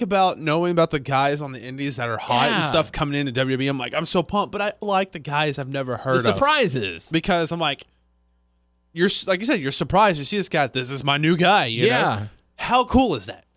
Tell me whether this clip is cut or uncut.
cut